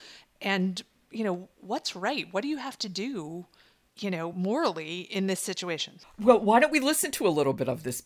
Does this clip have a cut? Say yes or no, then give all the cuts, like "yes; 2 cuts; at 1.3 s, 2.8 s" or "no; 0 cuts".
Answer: no; 0 cuts